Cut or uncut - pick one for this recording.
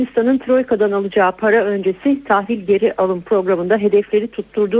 uncut